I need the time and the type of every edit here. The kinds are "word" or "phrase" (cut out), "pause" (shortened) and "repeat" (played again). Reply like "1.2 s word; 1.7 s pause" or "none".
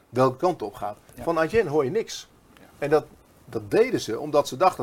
none